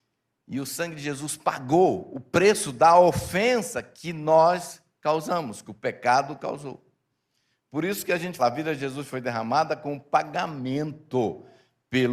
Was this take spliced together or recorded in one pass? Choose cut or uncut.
cut